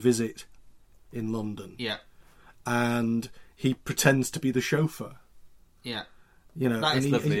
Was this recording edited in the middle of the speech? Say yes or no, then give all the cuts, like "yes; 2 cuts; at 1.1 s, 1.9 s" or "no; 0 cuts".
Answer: no; 0 cuts